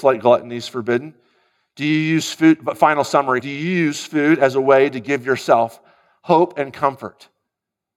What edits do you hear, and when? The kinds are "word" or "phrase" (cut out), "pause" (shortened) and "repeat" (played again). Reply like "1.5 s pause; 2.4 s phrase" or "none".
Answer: 3.4 s word